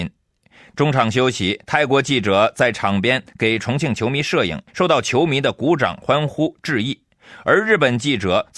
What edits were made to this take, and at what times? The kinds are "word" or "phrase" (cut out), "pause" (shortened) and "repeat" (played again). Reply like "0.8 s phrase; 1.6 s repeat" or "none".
4.7 s pause